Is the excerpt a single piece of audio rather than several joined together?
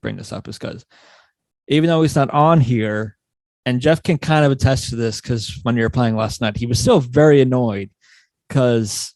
yes; 0 cuts

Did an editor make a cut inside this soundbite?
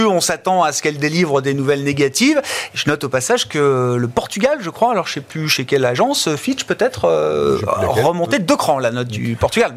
no; 0 cuts

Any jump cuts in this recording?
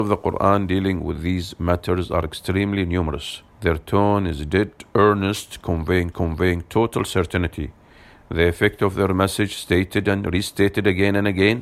yes; 2 cuts; at 3.5 s, 6.1 s

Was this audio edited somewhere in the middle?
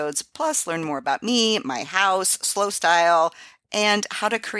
no; 0 cuts

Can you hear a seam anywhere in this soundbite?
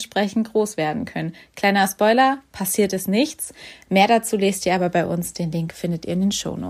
no; 0 cuts

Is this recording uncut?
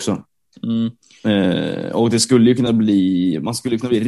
yes; 0 cuts

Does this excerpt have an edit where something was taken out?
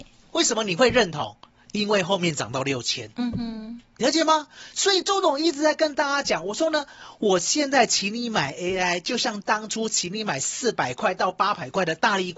yes; 1 cut; at 1.5 s

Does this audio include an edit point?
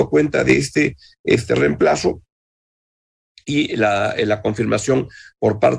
no; 0 cuts

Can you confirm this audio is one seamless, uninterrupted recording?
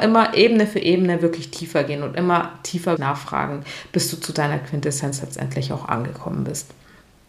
no; 1 cut; at 3.0 s

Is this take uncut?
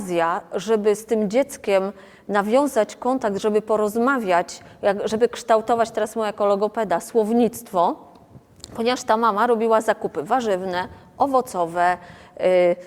yes; 0 cuts

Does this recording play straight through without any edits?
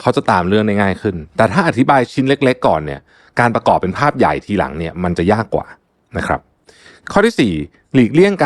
yes; 0 cuts

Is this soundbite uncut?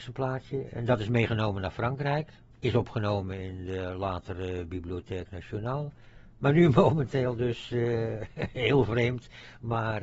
yes; 0 cuts

